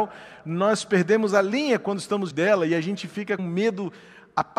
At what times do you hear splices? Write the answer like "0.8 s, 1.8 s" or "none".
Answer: 2.3 s, 3.4 s